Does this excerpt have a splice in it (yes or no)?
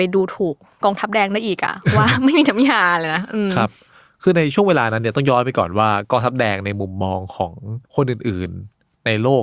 yes